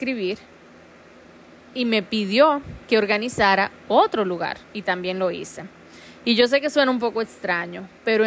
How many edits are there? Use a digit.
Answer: 2